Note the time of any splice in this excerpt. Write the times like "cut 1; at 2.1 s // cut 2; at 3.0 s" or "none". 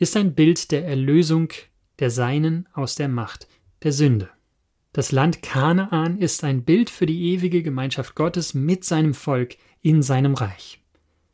none